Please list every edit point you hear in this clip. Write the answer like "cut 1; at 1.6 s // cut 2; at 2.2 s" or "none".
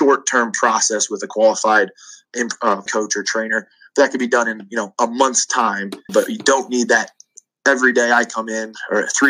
cut 1; at 2.3 s // cut 2; at 2.9 s // cut 3; at 6.1 s